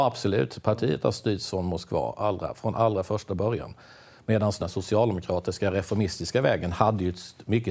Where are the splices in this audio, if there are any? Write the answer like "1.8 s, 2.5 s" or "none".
4.6 s